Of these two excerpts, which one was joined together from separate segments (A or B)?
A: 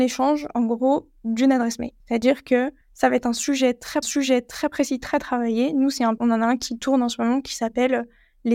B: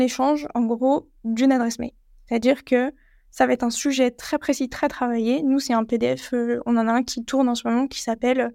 A